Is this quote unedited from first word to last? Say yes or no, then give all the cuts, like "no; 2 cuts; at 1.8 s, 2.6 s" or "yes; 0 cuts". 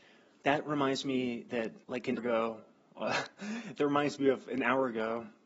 no; 2 cuts; at 1.8 s, 2.2 s